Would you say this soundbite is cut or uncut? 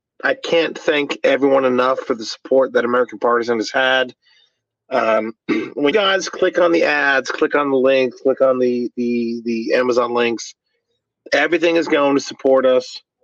cut